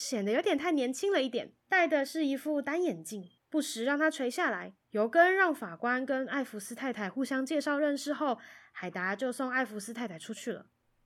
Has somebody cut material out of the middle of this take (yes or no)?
yes